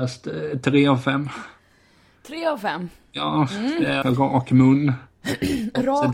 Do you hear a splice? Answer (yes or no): yes